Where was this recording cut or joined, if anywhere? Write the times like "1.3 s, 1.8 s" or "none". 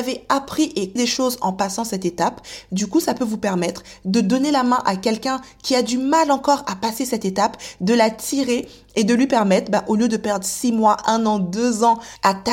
1.0 s